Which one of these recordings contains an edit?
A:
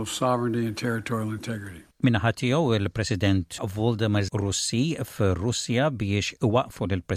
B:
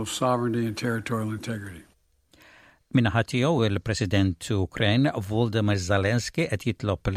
A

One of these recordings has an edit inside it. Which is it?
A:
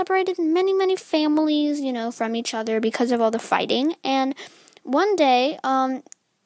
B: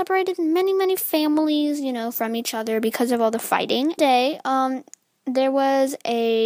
B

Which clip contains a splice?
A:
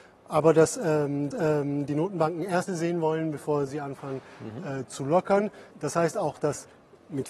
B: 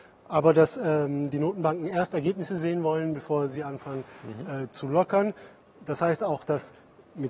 A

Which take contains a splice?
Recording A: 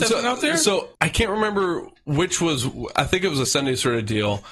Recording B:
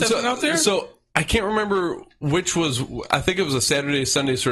A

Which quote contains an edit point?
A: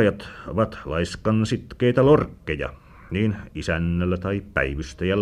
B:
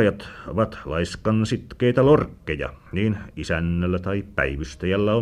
B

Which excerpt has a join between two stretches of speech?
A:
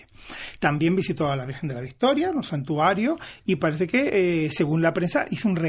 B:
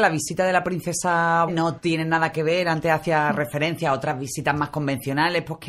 B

